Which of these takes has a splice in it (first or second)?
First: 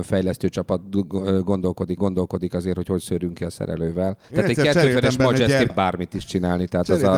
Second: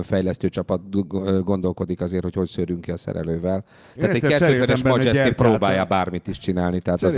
first